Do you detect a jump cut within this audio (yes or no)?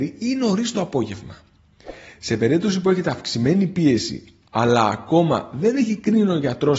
no